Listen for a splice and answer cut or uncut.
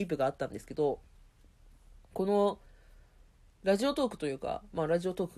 uncut